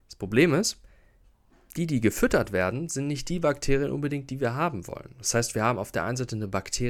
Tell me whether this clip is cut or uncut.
uncut